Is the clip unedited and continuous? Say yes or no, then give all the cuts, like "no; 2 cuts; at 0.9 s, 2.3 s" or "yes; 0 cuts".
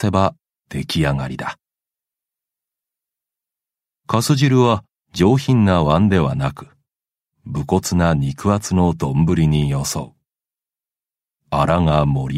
yes; 0 cuts